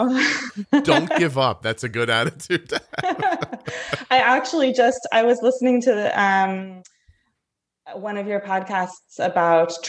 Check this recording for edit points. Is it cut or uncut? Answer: uncut